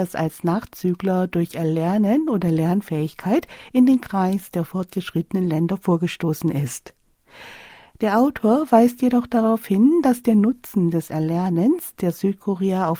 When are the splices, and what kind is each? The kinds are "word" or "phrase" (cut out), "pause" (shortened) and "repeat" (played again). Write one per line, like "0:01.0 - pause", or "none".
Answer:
none